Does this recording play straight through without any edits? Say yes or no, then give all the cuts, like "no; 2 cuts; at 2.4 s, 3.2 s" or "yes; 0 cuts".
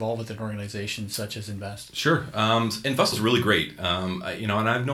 no; 1 cut; at 3.1 s